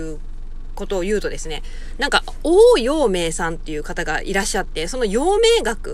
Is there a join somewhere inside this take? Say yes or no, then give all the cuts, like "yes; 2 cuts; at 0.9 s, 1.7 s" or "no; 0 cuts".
no; 0 cuts